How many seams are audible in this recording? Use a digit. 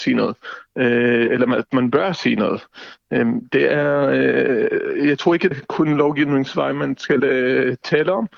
1